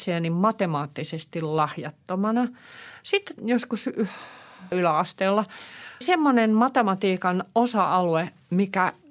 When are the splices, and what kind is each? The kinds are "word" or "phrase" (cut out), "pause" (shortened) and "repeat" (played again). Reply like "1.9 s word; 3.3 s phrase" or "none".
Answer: 3.4 s phrase; 4.7 s phrase; 6.0 s word